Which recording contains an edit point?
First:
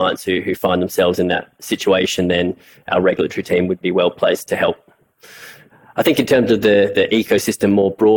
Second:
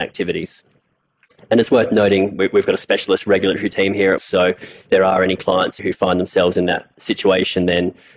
second; 3 cuts; at 4.2 s, 4.9 s, 5.8 s

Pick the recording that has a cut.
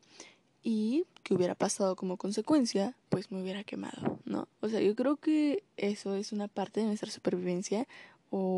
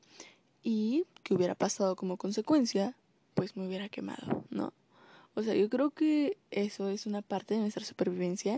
first; 2 cuts; at 3.0 s, 4.5 s

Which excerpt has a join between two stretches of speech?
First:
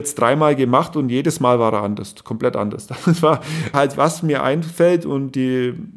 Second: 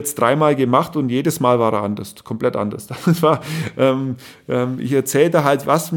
first; 1 cut; at 3.7 s

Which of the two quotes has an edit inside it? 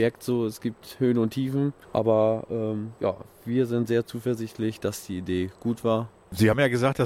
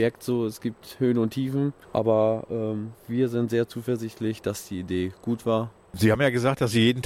second; 1 cut; at 2.9 s

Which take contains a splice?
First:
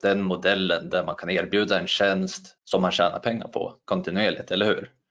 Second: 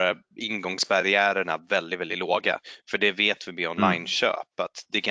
first; 1 cut; at 2.6 s

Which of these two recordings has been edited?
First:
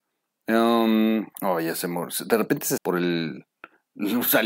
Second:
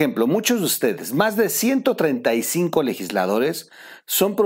first; 2 cuts; at 1.3 s, 2.8 s

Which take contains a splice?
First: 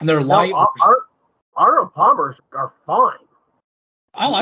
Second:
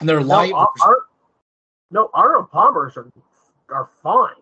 first; 2 cuts; at 1.5 s, 2.4 s

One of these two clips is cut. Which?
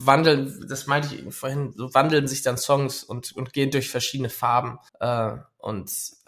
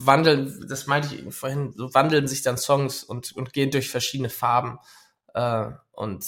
first; 1 cut; at 4.9 s

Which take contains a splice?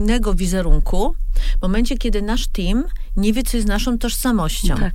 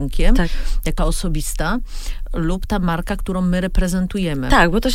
second; 1 cut; at 1.0 s

